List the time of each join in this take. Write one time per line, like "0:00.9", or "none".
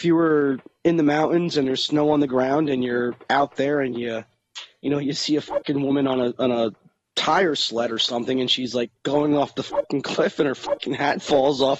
none